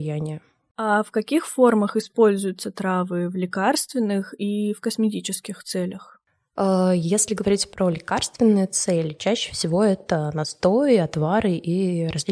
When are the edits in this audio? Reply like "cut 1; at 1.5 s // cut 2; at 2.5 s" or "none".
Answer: none